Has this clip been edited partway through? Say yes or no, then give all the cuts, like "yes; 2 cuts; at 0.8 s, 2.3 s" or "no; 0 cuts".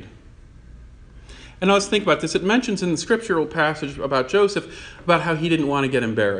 no; 0 cuts